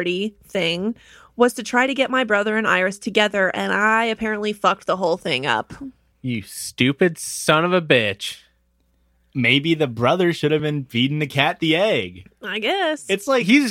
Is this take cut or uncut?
uncut